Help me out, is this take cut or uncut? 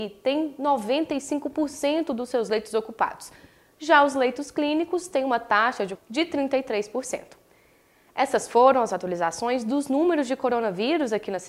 cut